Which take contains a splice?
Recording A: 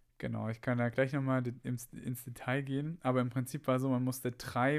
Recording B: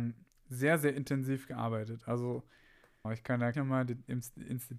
B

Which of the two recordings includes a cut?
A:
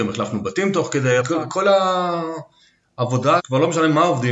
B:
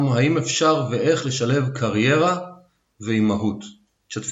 A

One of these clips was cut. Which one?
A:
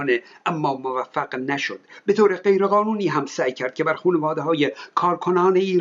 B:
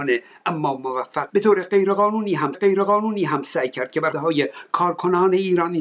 B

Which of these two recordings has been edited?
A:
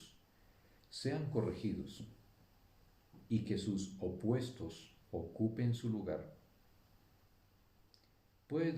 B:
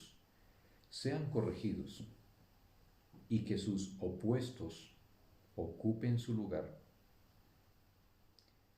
A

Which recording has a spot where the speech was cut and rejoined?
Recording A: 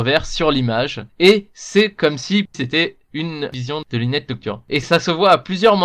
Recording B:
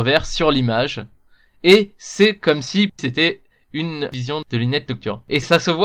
A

